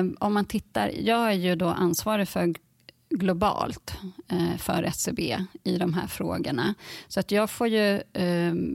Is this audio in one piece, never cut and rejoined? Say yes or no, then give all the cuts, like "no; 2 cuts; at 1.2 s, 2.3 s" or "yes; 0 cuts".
yes; 0 cuts